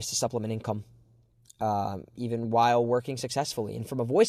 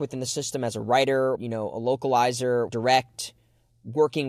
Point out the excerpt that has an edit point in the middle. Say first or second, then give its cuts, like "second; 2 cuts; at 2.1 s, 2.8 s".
second; 2 cuts; at 1.4 s, 2.7 s